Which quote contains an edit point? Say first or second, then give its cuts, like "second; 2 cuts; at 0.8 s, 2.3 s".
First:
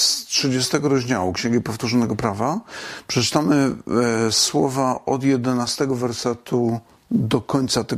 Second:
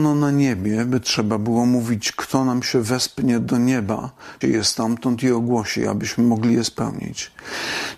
second; 1 cut; at 4.4 s